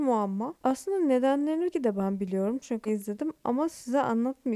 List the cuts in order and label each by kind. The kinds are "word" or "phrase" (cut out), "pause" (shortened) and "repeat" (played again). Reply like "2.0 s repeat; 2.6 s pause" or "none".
1.7 s word; 2.9 s word